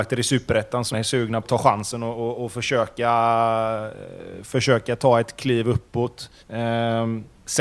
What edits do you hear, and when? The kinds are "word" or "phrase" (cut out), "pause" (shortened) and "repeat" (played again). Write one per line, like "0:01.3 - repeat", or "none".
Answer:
0:00.9 - word
0:01.4 - word
0:06.4 - pause